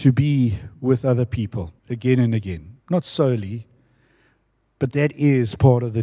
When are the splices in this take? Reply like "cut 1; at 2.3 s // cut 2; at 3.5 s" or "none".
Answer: cut 1; at 1.8 s // cut 2; at 2.8 s // cut 3; at 4.9 s

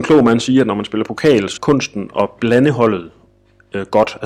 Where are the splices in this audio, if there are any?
cut 1; at 1.6 s

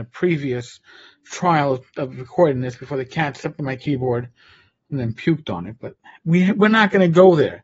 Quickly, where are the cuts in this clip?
none

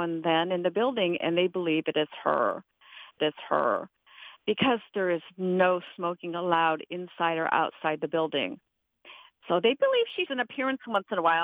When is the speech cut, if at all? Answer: cut 1; at 3.2 s // cut 2; at 10.3 s

